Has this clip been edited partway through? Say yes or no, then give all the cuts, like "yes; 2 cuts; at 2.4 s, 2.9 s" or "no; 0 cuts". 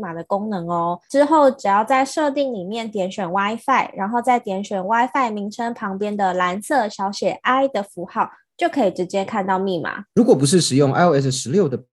no; 0 cuts